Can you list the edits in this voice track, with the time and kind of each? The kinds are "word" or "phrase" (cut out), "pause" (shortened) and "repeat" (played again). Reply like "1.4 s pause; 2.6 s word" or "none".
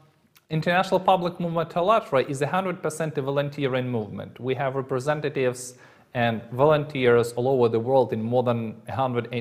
none

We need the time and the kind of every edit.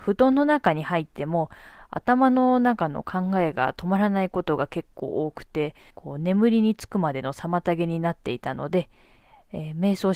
5.9 s pause

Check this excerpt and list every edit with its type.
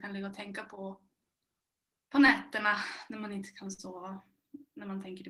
none

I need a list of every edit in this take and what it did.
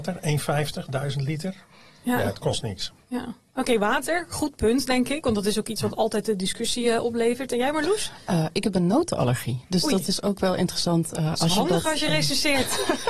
none

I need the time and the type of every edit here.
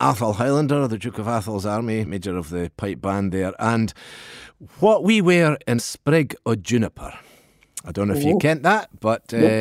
2.1 s word; 5.8 s phrase

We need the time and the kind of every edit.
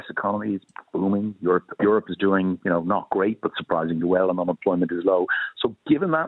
none

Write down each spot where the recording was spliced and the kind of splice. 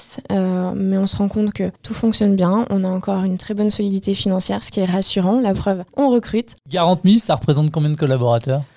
1.8 s pause; 5.9 s pause

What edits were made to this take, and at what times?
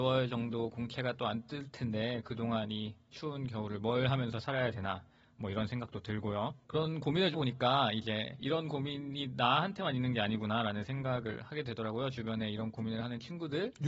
6.6 s pause; 7.3 s word

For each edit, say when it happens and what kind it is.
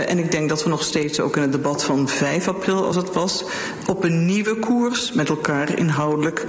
none

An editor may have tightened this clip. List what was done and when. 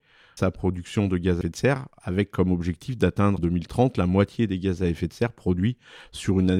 1.4 s word; 3.4 s word

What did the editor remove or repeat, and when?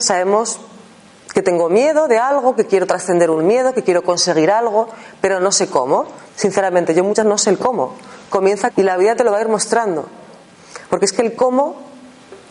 6.3 s pause; 7.2 s word; 8.7 s word

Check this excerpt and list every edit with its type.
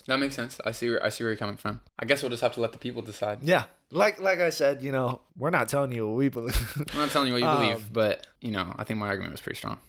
1.9 s pause; 5.3 s pause; 8.4 s pause

